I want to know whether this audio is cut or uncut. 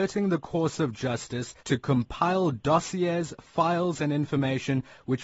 cut